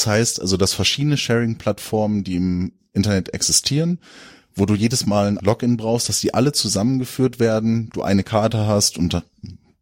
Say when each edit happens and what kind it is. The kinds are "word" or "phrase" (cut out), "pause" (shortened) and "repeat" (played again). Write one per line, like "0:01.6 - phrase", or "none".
0:05.4 - word